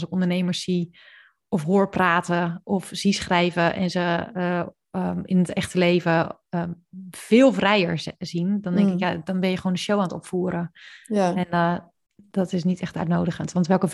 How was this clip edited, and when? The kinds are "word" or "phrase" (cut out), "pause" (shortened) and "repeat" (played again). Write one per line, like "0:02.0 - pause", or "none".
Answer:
none

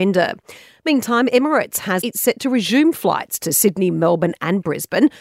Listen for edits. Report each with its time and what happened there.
0:02.0 - word

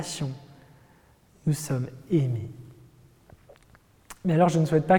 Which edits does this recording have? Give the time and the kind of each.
none

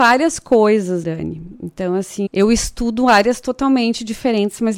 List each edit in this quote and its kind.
0:01.0 - word
0:02.3 - word

